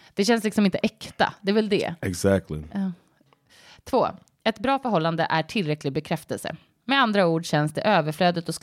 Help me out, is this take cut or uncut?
uncut